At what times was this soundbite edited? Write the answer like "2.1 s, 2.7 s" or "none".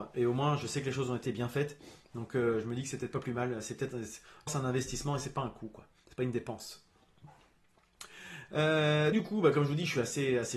1.2 s, 4.5 s, 9.1 s